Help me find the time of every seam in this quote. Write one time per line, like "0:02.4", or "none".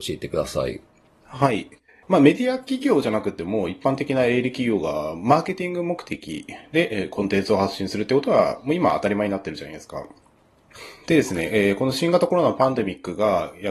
0:01.9